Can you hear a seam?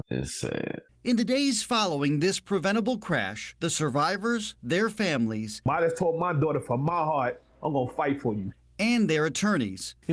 yes; 1 cut; at 7.5 s

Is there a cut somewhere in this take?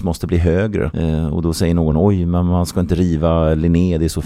no; 0 cuts

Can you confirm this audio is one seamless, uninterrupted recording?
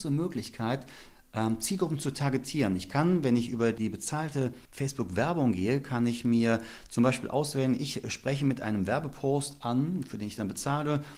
yes; 0 cuts

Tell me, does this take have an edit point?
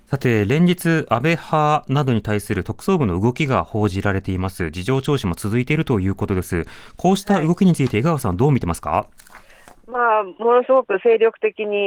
no; 0 cuts

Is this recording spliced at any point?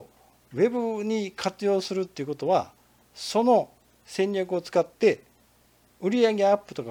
no; 0 cuts

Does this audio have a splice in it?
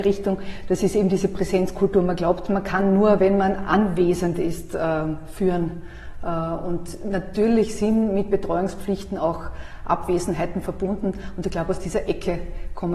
no; 0 cuts

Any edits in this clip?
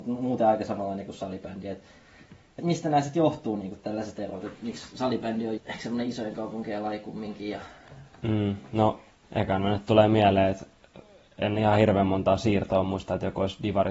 yes; 4 cuts; at 2.6 s, 3.8 s, 5.6 s, 9.1 s

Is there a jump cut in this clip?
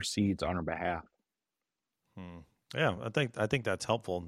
no; 0 cuts

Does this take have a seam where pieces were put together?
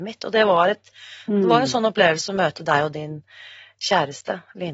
no; 0 cuts

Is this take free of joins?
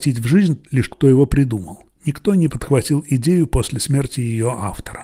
no; 1 cut; at 0.9 s

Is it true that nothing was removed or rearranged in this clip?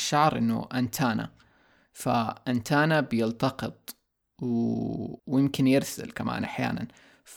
no; 1 cut; at 5.2 s

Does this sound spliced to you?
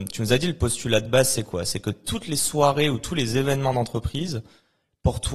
no; 0 cuts

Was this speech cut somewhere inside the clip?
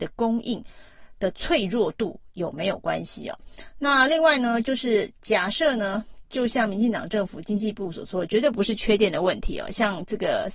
no; 0 cuts

